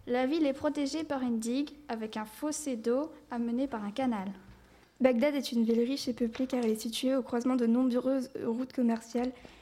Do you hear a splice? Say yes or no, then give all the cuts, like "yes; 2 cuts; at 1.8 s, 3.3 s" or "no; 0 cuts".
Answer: no; 0 cuts